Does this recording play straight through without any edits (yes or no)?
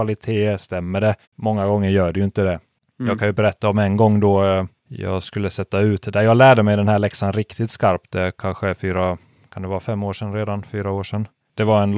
no